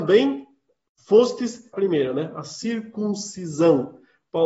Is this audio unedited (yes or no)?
no